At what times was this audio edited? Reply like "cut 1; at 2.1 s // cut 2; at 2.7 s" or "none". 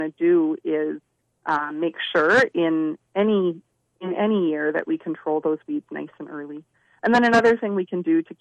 none